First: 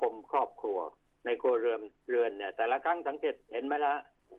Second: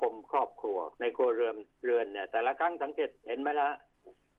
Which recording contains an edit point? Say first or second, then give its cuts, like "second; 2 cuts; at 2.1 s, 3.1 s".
second; 1 cut; at 0.9 s